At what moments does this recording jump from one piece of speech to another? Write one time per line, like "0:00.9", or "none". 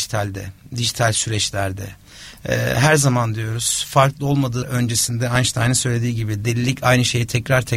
0:04.6